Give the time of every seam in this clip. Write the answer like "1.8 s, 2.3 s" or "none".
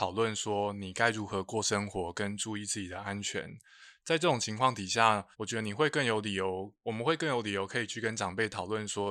5.3 s